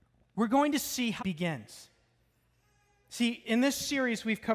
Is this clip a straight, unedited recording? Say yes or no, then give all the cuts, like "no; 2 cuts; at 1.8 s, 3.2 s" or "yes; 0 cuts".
no; 1 cut; at 1.2 s